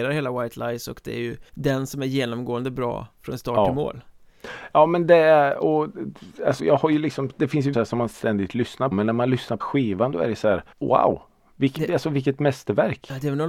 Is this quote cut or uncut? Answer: cut